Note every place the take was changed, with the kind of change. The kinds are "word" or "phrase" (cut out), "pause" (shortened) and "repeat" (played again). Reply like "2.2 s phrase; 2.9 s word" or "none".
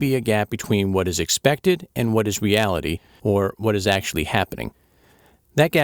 none

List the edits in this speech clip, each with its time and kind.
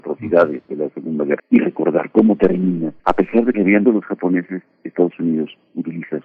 1.4 s word; 3.0 s pause; 3.5 s phrase; 3.9 s word

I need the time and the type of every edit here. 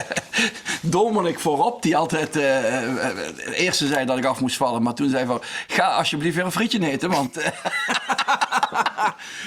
none

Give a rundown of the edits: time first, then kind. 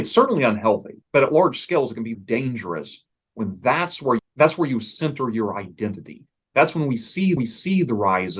1.0 s pause; 2.1 s word; 4.2 s phrase; 7.4 s repeat

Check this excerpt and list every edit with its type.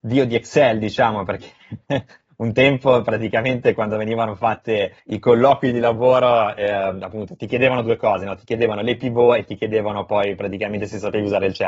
5.0 s pause

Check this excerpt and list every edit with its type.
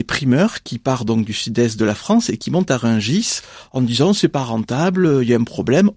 none

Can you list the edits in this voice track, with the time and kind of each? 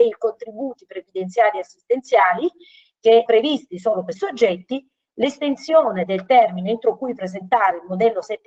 3.3 s word; 4.2 s word

